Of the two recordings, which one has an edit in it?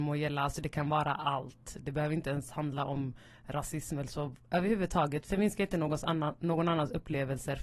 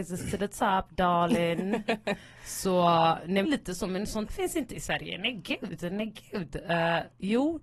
second; 2 cuts; at 3.4 s, 4.3 s

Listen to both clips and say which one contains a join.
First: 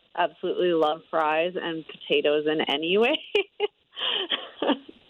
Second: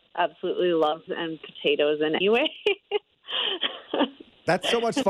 second; 2 cuts; at 1.1 s, 2.2 s

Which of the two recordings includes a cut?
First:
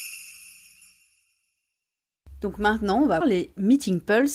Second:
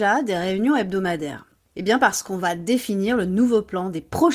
first; 1 cut; at 3.2 s

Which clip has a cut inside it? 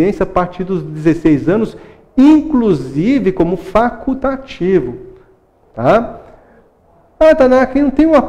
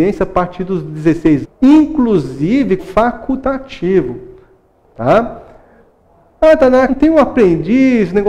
second; 3 cuts; at 1.4 s, 2.8 s, 6.9 s

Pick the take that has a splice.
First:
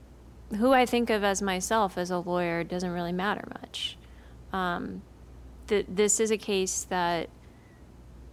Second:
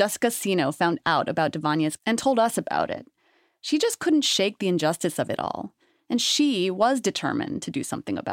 second; 1 cut; at 2.0 s

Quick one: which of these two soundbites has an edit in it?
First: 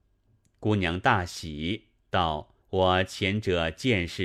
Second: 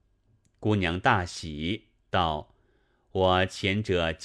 first; 1 cut; at 2.6 s

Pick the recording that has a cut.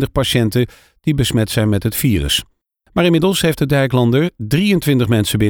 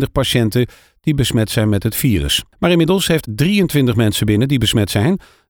second; 2 cuts; at 2.5 s, 3.2 s

